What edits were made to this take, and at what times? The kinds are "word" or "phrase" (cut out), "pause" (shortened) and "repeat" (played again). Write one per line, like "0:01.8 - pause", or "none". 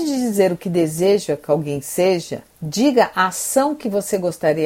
0:02.5 - pause